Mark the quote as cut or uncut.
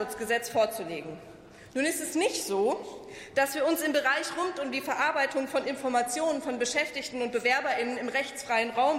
uncut